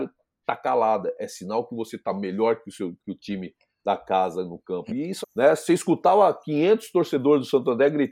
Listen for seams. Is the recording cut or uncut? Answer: cut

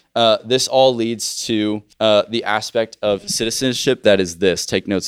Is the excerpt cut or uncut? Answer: cut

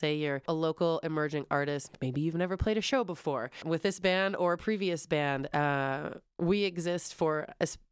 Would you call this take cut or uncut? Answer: uncut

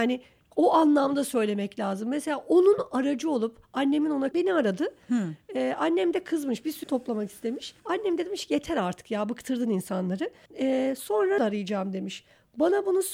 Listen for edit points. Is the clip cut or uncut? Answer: cut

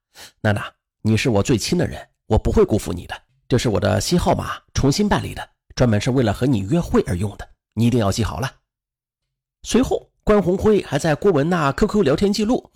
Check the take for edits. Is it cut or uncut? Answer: uncut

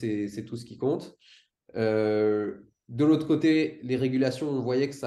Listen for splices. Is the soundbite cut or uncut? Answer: uncut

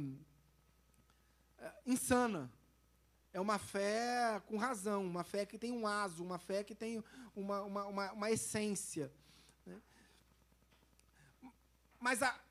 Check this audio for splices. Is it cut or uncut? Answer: uncut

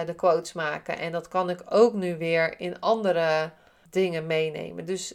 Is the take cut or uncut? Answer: uncut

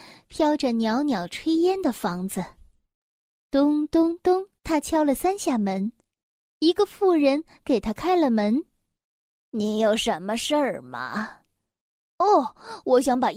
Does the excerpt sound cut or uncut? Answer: cut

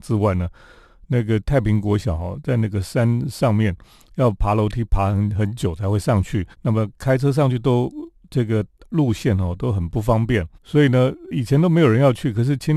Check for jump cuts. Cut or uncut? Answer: cut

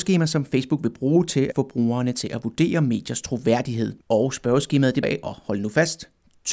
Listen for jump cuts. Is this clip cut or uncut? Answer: cut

